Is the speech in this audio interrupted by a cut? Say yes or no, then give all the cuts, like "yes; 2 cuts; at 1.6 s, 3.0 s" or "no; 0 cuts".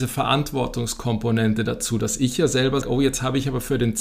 yes; 1 cut; at 2.8 s